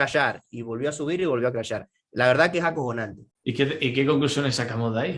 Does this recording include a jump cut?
yes; 1 cut; at 3.3 s

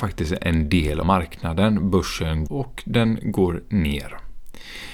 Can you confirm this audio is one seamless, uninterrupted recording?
no; 2 cuts; at 1.0 s, 2.5 s

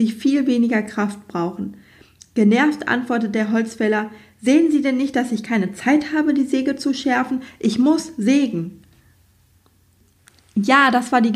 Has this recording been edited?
no; 0 cuts

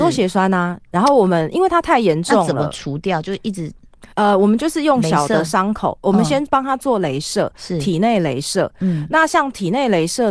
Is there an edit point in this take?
yes; 1 cut; at 4.1 s

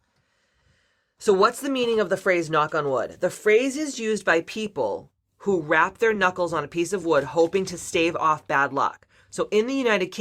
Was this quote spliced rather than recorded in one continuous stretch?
no; 0 cuts

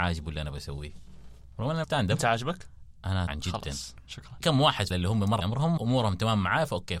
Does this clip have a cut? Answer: yes; 6 cuts; at 1.8 s, 3.3 s, 4.4 s, 4.9 s, 5.4 s, 5.8 s

